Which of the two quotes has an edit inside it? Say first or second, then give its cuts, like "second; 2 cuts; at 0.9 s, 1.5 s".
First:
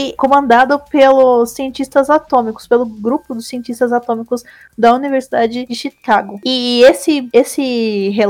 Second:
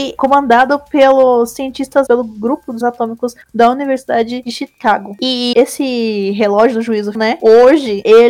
second; 5 cuts; at 2.1 s, 2.8 s, 3.4 s, 5.5 s, 7.1 s